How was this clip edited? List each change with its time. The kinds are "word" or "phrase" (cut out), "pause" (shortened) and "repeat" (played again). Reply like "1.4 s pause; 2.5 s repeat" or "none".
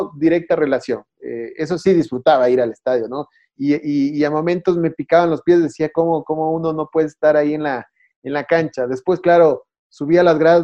none